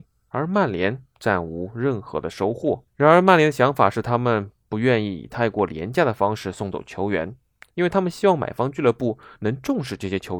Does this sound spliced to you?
yes; 3 cuts; at 1.1 s, 2.9 s, 4.6 s

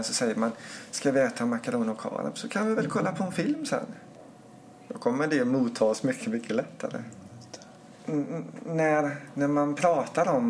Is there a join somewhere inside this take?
yes; 1 cut; at 8.0 s

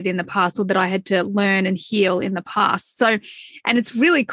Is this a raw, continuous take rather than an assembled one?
yes; 0 cuts

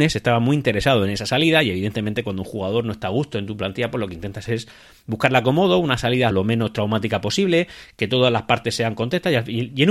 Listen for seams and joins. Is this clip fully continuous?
no; 1 cut; at 6.3 s

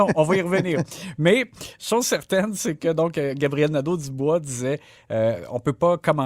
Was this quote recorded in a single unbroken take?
yes; 0 cuts

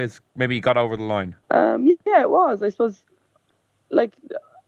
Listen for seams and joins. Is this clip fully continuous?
no; 1 cut; at 1.4 s

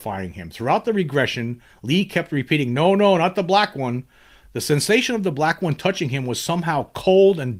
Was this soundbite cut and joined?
no; 0 cuts

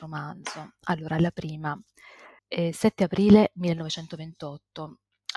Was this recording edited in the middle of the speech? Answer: yes; 1 cut; at 2.4 s

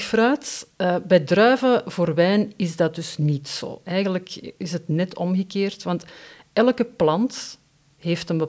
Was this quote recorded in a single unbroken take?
yes; 0 cuts

